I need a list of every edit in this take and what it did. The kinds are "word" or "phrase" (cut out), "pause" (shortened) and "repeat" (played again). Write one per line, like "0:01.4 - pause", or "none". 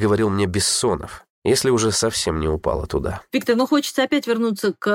0:01.3 - pause